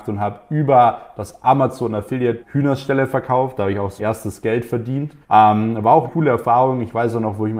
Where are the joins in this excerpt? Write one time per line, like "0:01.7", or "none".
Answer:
0:02.4
0:04.0
0:05.2
0:06.1